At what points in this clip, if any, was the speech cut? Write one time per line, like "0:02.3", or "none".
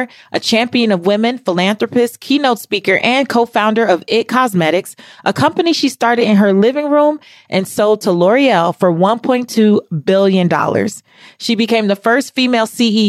none